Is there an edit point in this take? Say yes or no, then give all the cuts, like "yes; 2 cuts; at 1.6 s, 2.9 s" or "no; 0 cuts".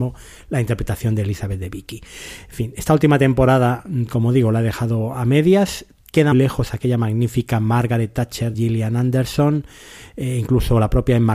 yes; 2 cuts; at 6.3 s, 8.5 s